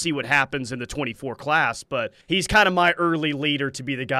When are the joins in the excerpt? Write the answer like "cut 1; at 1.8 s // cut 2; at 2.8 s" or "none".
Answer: cut 1; at 2.2 s